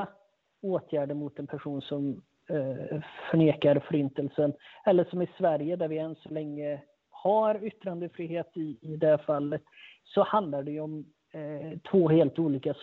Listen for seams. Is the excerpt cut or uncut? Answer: uncut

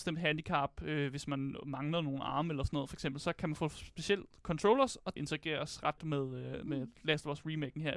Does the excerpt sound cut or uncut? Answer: cut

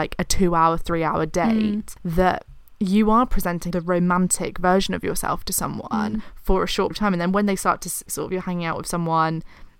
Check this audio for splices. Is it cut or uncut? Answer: cut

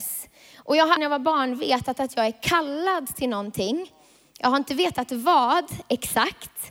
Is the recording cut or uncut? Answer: cut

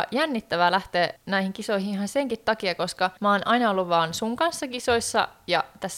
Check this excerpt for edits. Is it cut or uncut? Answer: cut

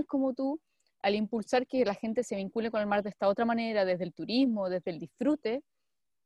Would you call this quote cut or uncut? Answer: cut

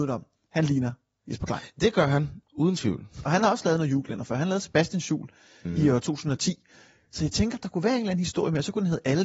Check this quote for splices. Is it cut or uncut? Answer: uncut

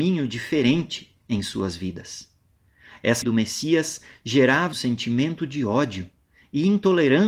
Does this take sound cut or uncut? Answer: cut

